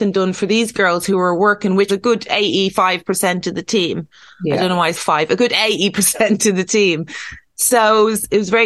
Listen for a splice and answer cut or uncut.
cut